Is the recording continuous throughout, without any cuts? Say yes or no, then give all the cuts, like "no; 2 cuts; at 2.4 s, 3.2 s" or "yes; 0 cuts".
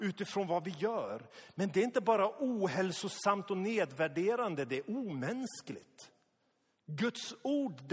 yes; 0 cuts